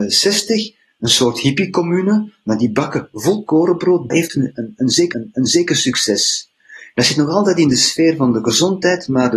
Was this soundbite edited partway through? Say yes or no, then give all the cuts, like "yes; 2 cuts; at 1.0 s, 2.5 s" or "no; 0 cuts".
yes; 2 cuts; at 4.1 s, 5.1 s